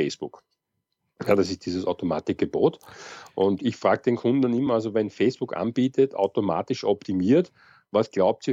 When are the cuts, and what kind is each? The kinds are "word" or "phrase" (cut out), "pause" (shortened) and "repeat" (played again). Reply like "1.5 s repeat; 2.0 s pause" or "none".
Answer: none